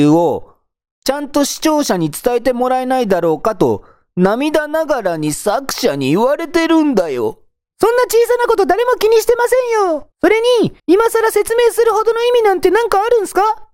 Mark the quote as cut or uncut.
cut